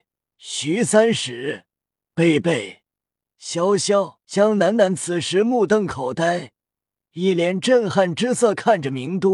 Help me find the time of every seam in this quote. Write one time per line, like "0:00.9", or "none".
0:04.2